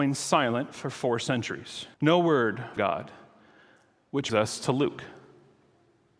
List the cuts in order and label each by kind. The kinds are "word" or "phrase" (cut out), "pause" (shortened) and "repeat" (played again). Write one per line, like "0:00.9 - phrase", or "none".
0:01.9 - pause
0:02.8 - word
0:04.3 - word